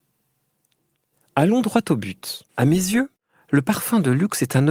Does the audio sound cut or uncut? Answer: cut